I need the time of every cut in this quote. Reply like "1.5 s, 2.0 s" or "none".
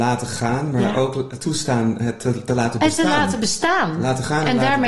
none